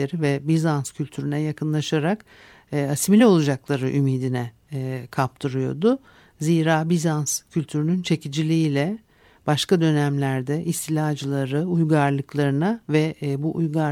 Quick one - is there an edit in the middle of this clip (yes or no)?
no